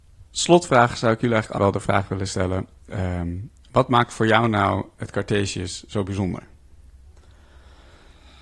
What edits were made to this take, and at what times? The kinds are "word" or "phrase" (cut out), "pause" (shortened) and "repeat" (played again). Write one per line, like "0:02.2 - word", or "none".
0:01.6 - word